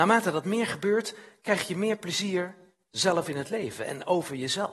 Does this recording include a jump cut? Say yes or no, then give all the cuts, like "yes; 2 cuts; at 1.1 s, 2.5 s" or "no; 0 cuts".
no; 0 cuts